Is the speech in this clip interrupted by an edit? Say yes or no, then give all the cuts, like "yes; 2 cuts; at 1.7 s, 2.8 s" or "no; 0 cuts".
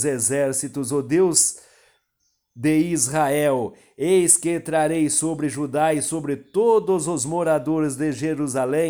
no; 0 cuts